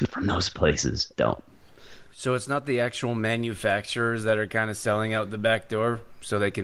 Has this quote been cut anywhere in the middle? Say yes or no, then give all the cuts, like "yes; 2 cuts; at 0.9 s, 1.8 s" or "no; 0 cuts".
yes; 1 cut; at 1.1 s